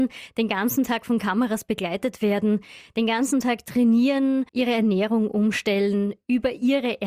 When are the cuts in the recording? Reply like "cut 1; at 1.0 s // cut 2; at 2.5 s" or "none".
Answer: cut 1; at 4.5 s